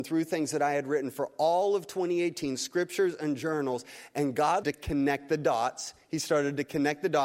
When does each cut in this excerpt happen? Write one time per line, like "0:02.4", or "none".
0:04.6